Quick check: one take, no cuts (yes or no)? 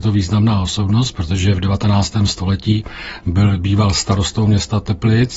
yes